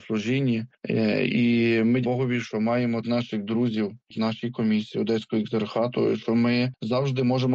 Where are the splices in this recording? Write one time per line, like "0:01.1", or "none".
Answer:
0:02.0
0:03.0
0:04.1